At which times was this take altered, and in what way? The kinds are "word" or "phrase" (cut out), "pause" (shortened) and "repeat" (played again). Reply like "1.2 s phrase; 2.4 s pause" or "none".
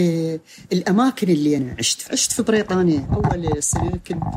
none